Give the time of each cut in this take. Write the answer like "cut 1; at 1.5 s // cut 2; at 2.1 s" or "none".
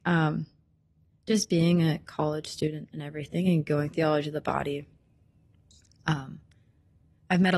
cut 1; at 3.9 s